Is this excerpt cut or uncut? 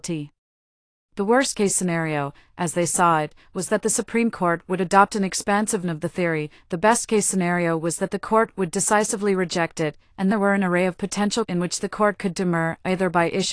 cut